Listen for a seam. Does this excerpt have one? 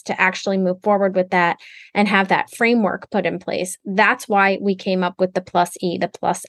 no; 0 cuts

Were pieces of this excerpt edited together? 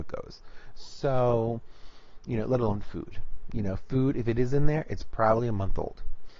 no; 0 cuts

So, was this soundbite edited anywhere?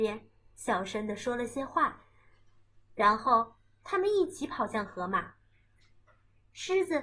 no; 0 cuts

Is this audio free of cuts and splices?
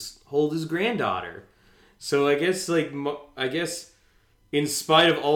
yes; 0 cuts

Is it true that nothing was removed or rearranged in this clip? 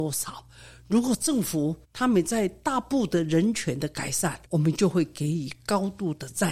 no; 2 cuts; at 1.8 s, 4.4 s

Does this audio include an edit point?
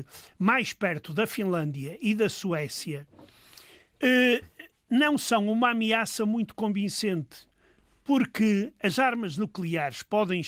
no; 0 cuts

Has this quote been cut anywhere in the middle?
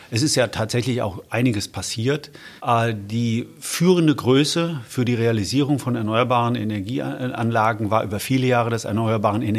yes; 1 cut; at 2.6 s

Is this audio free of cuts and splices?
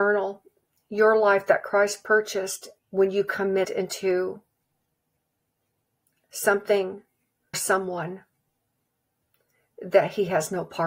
no; 3 cuts; at 2.8 s, 3.6 s, 7.5 s

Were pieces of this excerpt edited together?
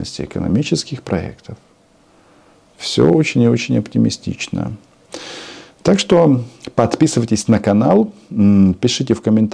no; 0 cuts

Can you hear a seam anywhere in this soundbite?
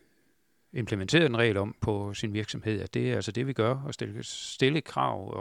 no; 0 cuts

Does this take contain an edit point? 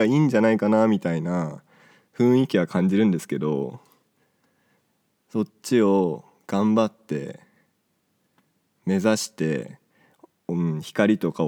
no; 0 cuts

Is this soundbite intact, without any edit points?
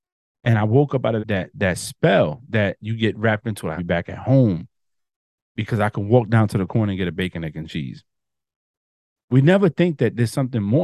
no; 5 cuts; at 1.2 s, 1.5 s, 2.4 s, 3.4 s, 3.8 s

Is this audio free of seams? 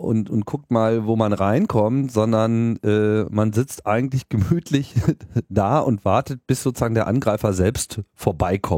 yes; 0 cuts

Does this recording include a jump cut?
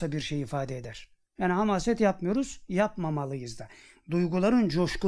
no; 0 cuts

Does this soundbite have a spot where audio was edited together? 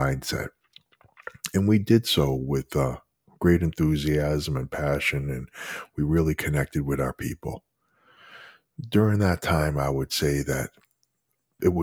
no; 0 cuts

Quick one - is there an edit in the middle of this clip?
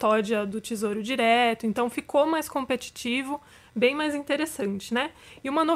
no; 0 cuts

